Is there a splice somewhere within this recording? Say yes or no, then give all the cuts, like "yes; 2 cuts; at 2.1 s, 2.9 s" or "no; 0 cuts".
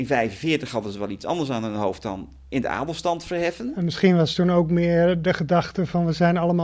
no; 0 cuts